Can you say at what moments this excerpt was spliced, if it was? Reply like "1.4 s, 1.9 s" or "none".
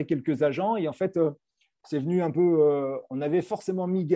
none